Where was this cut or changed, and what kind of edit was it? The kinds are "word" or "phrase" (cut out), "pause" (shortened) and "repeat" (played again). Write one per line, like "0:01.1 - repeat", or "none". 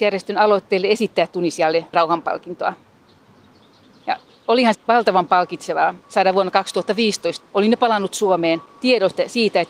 0:01.9 - word
0:04.7 - word
0:06.0 - pause
0:07.4 - word
0:08.7 - pause